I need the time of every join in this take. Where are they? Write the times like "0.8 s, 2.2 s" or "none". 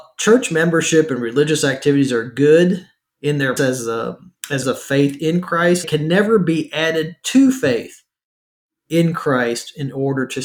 3.6 s, 4.6 s, 5.8 s